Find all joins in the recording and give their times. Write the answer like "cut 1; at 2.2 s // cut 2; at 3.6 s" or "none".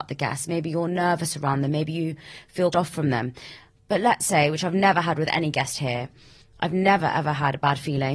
cut 1; at 2.7 s // cut 2; at 7.0 s